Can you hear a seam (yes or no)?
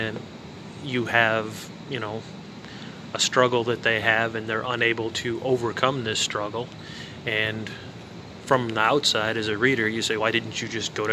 yes